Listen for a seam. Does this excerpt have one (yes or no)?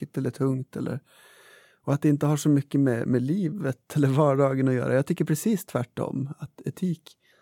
no